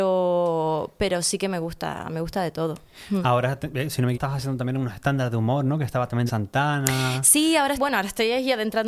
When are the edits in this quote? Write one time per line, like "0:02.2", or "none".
0:04.1
0:06.3
0:07.8